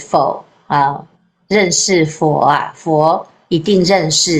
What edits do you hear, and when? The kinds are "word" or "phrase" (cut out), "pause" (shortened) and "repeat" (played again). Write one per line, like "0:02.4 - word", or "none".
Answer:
none